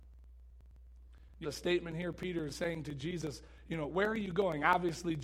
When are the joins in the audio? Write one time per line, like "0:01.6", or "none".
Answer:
0:01.4
0:02.5